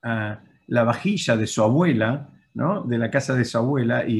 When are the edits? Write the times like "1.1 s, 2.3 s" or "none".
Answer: none